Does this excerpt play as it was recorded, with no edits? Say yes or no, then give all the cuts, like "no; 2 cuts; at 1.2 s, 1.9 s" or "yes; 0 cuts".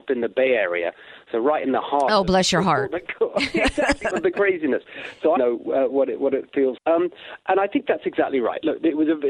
no; 3 cuts; at 4.1 s, 5.4 s, 6.8 s